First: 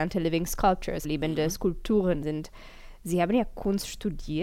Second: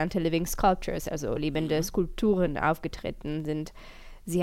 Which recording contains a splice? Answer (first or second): first